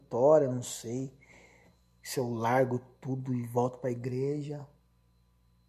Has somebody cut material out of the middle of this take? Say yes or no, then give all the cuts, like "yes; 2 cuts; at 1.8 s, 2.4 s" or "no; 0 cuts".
no; 0 cuts